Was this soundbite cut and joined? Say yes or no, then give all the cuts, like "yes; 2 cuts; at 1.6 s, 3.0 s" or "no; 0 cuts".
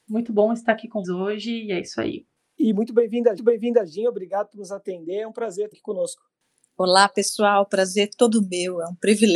yes; 3 cuts; at 1.0 s, 3.4 s, 5.7 s